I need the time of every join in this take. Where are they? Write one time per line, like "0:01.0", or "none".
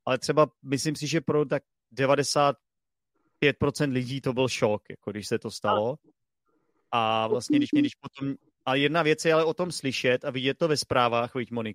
0:07.7